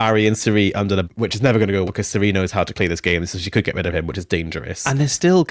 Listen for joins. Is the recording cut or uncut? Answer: cut